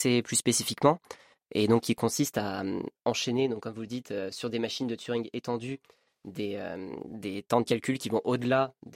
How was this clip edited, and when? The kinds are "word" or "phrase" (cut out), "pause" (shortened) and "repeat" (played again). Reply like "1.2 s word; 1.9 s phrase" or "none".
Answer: none